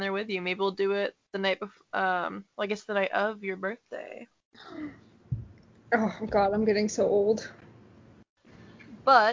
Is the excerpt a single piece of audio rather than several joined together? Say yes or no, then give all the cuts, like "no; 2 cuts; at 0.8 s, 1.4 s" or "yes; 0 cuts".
yes; 0 cuts